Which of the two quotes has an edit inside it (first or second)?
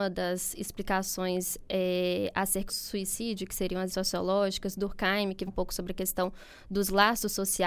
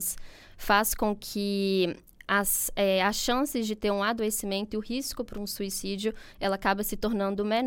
first